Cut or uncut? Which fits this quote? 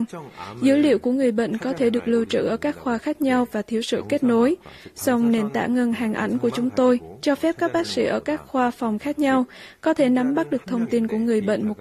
uncut